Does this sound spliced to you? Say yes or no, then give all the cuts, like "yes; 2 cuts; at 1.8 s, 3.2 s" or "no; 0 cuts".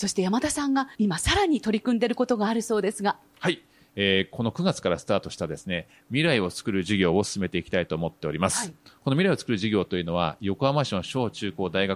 yes; 1 cut; at 1.0 s